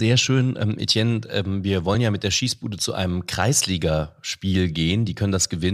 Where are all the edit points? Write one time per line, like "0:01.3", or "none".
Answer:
none